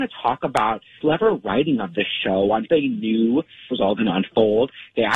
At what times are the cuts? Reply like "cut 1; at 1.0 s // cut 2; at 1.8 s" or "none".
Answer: cut 1; at 1.0 s // cut 2; at 2.6 s // cut 3; at 3.7 s

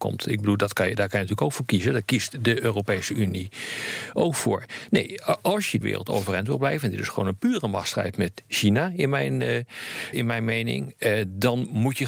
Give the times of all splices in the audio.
cut 1; at 5.8 s // cut 2; at 10.1 s

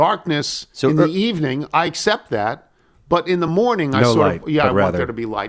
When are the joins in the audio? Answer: none

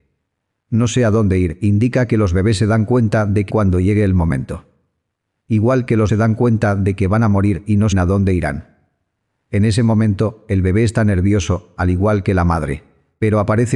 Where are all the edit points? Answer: cut 1; at 3.5 s // cut 2; at 6.1 s // cut 3; at 7.9 s

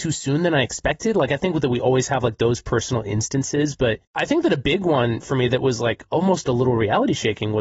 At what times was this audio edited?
cut 1; at 4.0 s

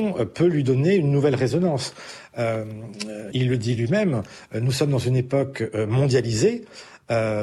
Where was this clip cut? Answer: cut 1; at 3.3 s

